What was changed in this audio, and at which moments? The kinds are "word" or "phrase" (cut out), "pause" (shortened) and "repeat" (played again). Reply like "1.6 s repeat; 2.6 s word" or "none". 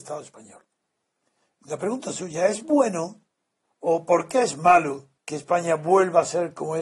3.6 s pause; 5.2 s pause